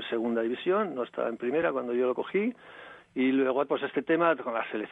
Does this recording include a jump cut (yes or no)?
yes